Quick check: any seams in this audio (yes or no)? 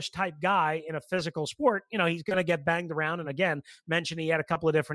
no